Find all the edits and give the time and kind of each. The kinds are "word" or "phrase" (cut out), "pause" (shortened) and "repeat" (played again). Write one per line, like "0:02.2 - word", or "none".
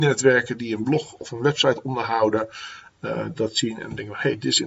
none